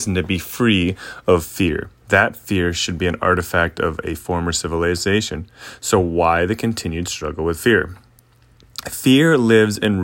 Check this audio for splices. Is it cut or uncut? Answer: cut